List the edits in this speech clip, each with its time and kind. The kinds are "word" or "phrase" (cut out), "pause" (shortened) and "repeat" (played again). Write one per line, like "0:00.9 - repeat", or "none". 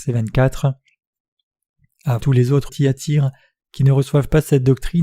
0:02.2 - phrase
0:02.7 - word